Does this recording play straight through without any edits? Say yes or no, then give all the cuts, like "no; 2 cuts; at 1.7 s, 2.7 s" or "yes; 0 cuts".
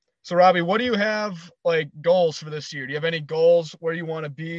yes; 0 cuts